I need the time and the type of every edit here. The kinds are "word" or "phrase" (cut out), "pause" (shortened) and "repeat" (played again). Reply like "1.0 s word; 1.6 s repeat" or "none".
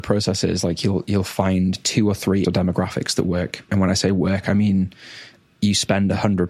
2.4 s word; 3.7 s word